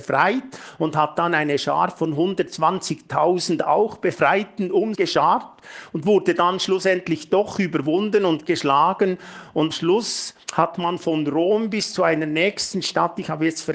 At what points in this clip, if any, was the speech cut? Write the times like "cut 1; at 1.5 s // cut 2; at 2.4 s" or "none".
cut 1; at 4.9 s // cut 2; at 9.7 s // cut 3; at 10.4 s